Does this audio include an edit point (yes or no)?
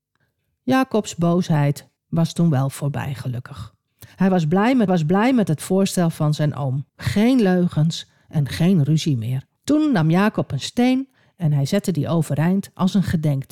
yes